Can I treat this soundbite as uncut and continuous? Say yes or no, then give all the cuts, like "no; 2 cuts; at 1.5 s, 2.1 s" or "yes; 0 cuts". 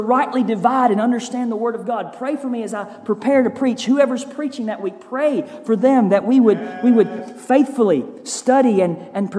yes; 0 cuts